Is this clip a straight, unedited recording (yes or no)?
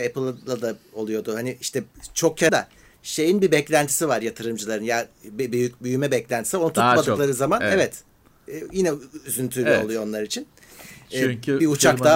no